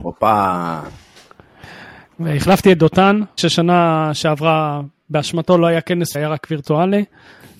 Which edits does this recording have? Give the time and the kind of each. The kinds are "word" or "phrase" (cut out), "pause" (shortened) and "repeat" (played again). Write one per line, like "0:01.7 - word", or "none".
0:03.4 - word
0:06.1 - word

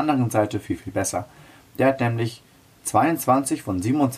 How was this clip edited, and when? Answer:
none

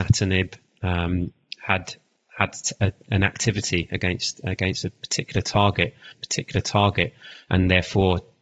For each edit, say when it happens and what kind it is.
0:06.1 - repeat

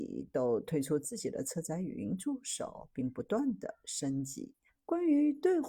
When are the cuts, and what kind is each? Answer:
0:04.7 - pause

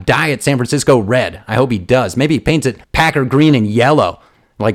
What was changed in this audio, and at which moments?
0:02.8 - pause

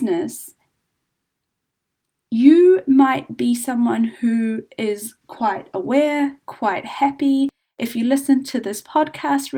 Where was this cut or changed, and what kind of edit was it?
none

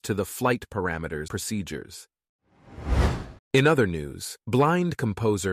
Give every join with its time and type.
0:01.3 - word
0:03.4 - pause
0:04.4 - pause

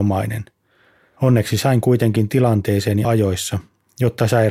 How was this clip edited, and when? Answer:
0:03.0 - word

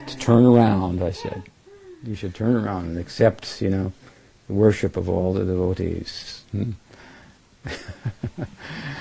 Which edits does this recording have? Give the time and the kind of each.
none

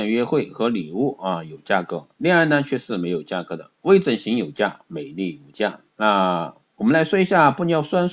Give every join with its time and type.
0:05.9 - pause

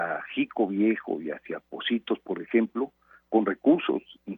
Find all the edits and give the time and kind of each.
none

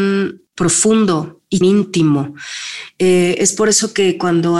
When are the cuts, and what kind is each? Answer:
0:01.6 - word

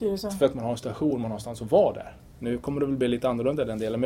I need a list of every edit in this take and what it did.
none

